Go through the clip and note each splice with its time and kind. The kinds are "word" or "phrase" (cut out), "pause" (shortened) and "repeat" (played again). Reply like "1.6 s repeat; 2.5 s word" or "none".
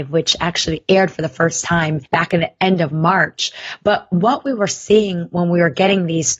none